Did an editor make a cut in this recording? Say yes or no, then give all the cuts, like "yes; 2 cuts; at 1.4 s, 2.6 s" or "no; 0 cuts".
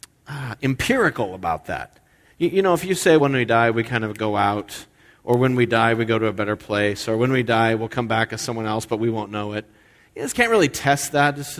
yes; 2 cuts; at 3.2 s, 10.3 s